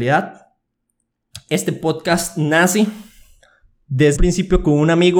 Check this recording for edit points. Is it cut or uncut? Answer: cut